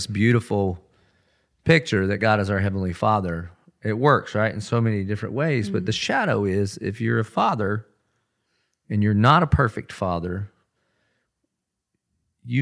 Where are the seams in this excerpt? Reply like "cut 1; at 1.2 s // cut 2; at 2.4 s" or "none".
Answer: none